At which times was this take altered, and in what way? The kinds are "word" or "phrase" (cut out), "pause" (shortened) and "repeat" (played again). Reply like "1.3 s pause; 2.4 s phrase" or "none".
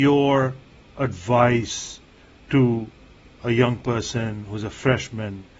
none